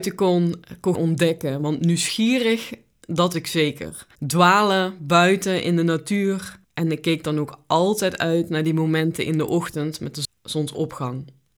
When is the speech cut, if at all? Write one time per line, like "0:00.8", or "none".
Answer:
0:00.9
0:03.3
0:04.1
0:06.6